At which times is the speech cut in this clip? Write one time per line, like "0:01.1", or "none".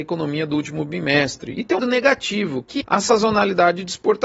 0:01.8
0:02.8